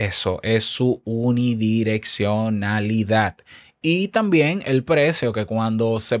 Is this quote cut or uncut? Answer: uncut